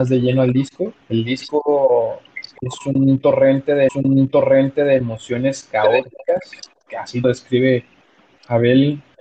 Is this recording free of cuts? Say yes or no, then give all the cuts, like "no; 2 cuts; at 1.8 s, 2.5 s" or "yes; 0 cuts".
no; 3 cuts; at 1.0 s, 3.9 s, 7.2 s